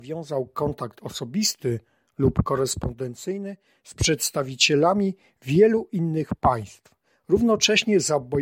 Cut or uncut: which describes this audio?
uncut